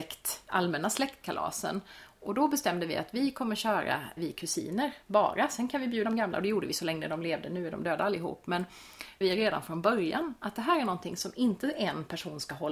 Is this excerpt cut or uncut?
cut